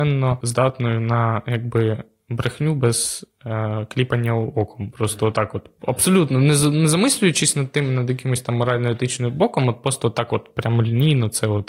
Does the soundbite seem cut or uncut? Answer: uncut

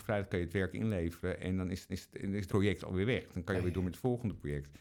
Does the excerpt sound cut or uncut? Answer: cut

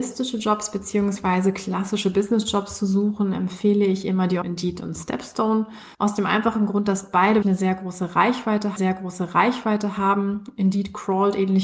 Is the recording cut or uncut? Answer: cut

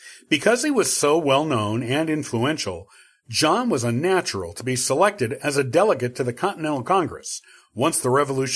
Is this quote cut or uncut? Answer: uncut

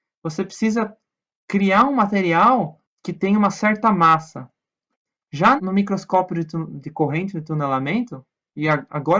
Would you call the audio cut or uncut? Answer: cut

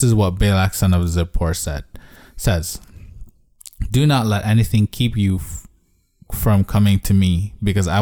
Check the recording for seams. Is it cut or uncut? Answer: uncut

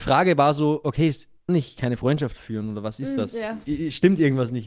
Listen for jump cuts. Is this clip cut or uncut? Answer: cut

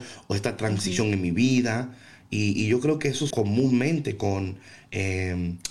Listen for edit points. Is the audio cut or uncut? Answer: cut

